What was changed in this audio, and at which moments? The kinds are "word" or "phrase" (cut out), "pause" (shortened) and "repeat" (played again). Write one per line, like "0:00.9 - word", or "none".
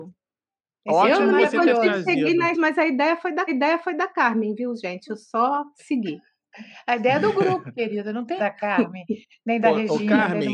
0:02.5 - word
0:03.5 - repeat
0:08.4 - word